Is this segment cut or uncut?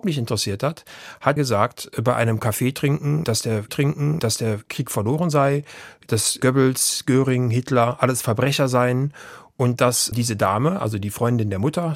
cut